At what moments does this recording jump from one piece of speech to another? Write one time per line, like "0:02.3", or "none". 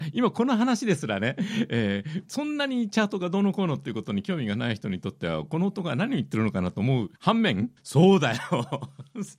0:02.3
0:07.2
0:07.8